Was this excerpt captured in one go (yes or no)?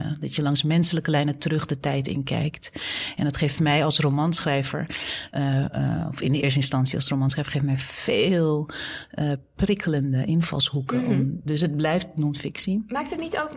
yes